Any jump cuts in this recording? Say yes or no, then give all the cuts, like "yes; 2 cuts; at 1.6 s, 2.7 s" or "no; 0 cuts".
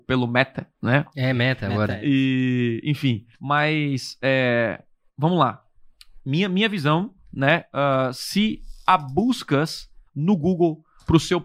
yes; 2 cuts; at 3.3 s, 10.1 s